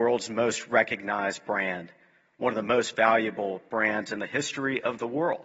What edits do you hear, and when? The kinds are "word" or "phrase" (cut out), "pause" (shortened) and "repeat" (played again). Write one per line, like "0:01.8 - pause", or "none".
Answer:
none